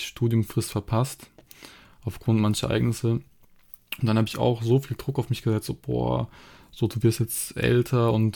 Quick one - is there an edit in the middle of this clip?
no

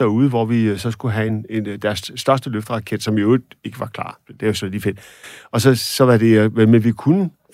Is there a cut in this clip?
no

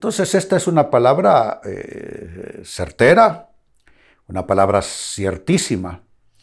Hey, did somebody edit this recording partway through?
no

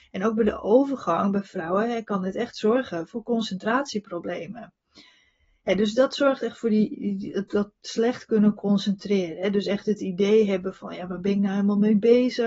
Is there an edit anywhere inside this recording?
no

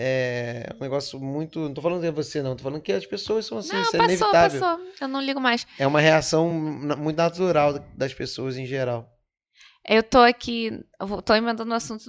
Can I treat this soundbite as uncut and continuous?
yes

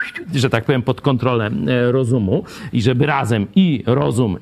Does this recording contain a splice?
no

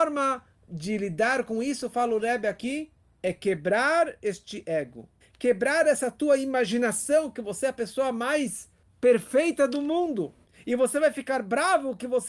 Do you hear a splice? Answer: no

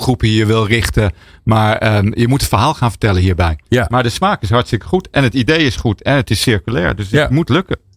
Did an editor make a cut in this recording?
no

